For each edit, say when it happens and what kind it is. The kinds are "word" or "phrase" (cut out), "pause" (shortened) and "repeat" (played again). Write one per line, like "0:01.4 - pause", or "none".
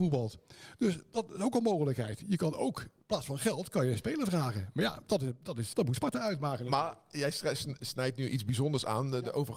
0:05.7 - word

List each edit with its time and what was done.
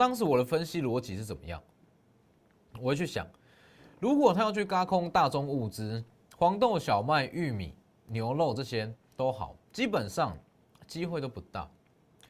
none

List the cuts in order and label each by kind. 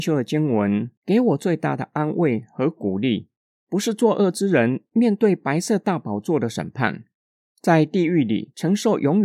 none

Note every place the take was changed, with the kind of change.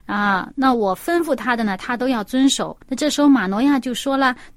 0:02.8 - pause

